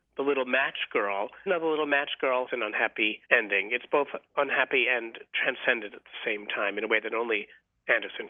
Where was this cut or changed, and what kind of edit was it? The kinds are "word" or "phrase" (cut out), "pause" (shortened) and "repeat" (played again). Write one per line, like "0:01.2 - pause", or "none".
0:01.5 - word
0:02.5 - word
0:03.2 - pause